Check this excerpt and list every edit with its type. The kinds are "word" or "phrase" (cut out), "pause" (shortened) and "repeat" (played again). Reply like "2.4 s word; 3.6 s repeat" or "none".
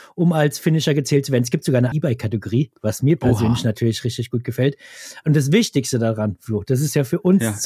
1.9 s word